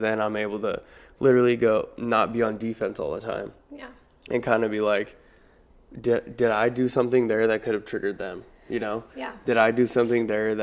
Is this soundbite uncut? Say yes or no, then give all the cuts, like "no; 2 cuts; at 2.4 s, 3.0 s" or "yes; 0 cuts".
yes; 0 cuts